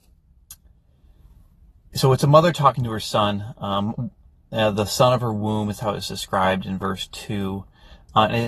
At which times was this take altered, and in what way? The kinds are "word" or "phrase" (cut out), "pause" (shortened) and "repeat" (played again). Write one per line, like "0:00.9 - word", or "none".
none